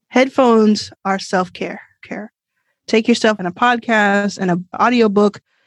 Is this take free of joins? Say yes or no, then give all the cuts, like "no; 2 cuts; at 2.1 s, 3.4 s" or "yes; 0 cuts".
no; 2 cuts; at 2.0 s, 3.4 s